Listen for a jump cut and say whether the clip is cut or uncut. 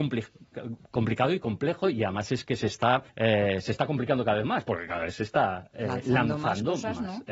cut